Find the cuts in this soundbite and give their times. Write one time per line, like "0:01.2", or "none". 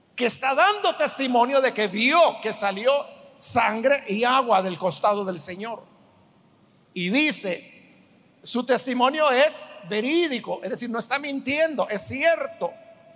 none